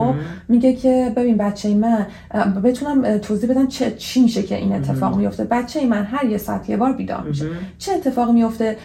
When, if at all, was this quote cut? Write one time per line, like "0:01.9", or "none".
none